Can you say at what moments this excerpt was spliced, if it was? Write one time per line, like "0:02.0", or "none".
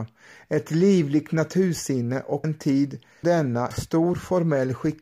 0:02.4
0:03.2
0:03.7

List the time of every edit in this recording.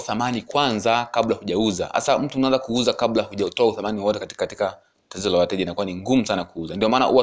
none

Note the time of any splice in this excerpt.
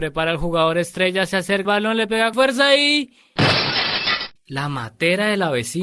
0:01.6
0:02.3
0:04.4

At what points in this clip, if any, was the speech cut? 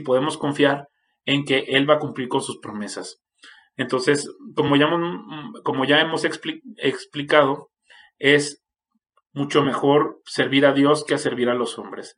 none

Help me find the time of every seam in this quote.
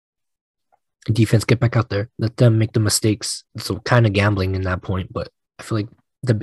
0:02.1
0:03.5

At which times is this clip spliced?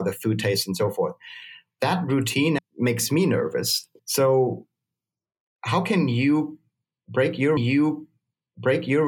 0:02.6
0:04.0
0:07.6

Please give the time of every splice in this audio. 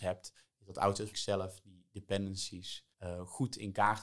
0:01.1
0:02.9

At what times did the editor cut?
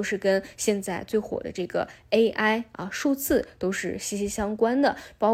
none

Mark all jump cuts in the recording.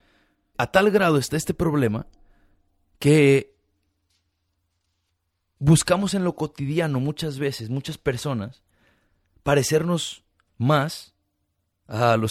none

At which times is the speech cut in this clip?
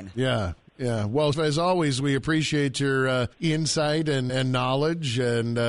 0:01.3
0:03.3
0:04.3

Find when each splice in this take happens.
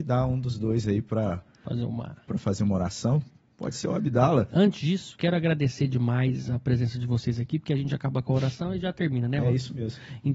none

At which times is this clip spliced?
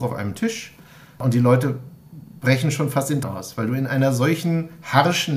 0:03.2

